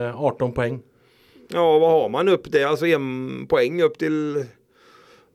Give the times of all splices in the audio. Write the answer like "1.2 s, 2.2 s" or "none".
none